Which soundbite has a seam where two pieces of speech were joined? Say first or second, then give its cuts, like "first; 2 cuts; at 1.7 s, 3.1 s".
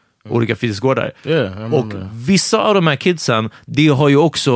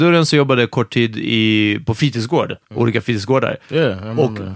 second; 1 cut; at 2.6 s